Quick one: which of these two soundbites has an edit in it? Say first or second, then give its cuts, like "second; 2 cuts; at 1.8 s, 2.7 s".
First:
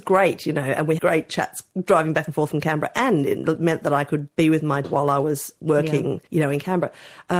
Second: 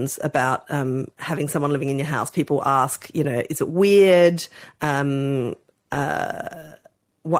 first; 4 cuts; at 1.0 s, 4.3 s, 4.8 s, 6.3 s